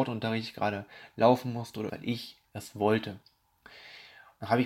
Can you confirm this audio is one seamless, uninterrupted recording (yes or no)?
no